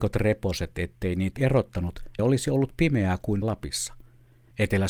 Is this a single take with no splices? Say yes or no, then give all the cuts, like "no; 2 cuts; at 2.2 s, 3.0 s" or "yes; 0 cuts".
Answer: no; 3 cuts; at 1.4 s, 2.2 s, 3.4 s